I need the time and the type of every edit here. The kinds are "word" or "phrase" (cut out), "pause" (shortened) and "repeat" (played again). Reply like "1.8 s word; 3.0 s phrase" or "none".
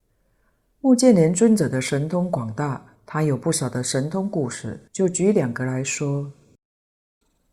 2.9 s pause; 4.9 s pause